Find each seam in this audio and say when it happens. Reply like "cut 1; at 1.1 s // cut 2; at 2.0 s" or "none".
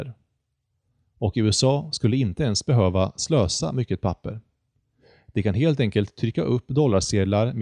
none